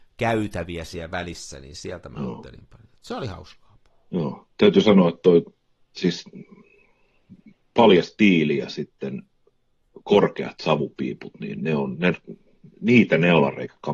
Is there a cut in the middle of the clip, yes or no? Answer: no